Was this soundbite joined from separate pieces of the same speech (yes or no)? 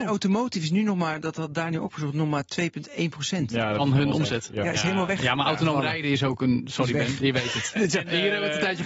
no